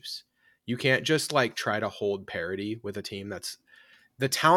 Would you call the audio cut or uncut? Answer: uncut